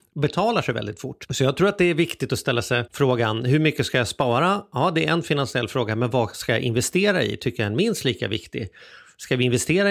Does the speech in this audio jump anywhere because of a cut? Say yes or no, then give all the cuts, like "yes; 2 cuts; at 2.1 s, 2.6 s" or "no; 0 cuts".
no; 0 cuts